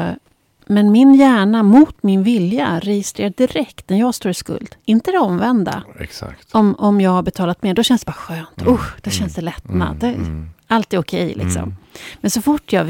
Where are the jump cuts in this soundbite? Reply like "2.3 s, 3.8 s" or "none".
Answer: none